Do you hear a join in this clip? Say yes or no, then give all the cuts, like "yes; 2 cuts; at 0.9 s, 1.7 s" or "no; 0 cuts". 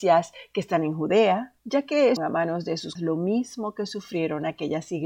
yes; 3 cuts; at 1.6 s, 2.2 s, 3.0 s